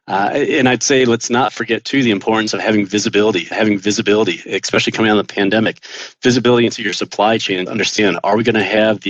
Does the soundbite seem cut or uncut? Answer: cut